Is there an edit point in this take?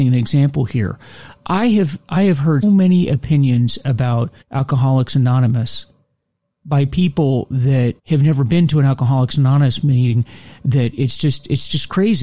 yes; 3 cuts; at 2.6 s, 4.4 s, 8.0 s

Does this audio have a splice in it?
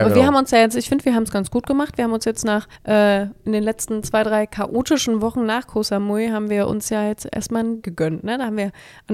yes; 2 cuts; at 2.8 s, 7.8 s

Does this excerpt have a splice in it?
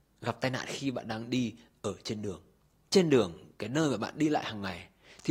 no; 0 cuts

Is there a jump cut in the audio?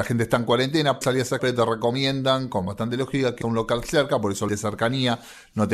yes; 4 cuts; at 1.0 s, 1.4 s, 3.4 s, 4.5 s

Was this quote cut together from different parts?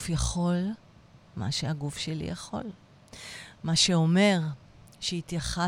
no; 0 cuts

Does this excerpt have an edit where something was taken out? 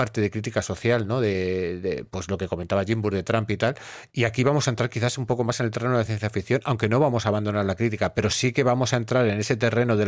no; 0 cuts

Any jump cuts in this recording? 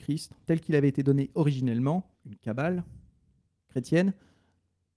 yes; 1 cut; at 2.1 s

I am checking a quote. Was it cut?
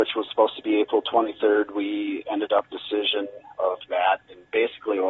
yes; 2 cuts; at 2.7 s, 3.9 s

